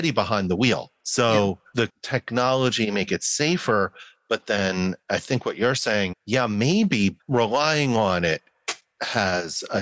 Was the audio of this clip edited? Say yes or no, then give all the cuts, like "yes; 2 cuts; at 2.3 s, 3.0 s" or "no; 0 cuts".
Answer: yes; 4 cuts; at 1.9 s, 5.0 s, 6.1 s, 7.2 s